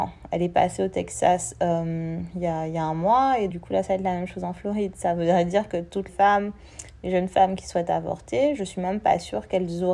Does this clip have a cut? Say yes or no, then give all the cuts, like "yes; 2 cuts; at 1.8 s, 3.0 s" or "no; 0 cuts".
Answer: yes; 2 cuts; at 3.5 s, 6.1 s